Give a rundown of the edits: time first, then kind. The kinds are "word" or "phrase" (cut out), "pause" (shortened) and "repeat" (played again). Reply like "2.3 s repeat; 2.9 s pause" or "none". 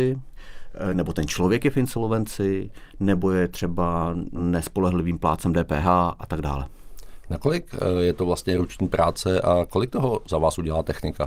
none